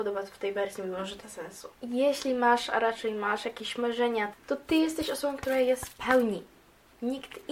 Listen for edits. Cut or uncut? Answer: cut